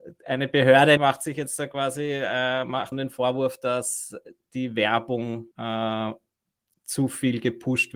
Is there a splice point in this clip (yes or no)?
yes